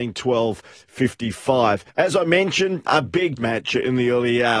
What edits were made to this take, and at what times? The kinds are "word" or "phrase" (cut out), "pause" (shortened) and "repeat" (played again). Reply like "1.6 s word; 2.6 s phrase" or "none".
1.9 s pause; 2.9 s word; 3.4 s word